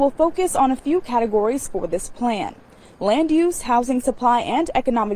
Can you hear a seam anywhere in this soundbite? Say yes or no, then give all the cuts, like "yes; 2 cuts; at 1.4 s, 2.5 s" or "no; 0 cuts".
no; 0 cuts